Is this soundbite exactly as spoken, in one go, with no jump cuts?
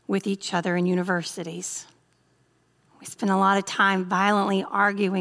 yes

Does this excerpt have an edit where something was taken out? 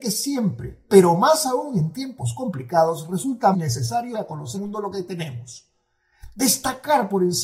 yes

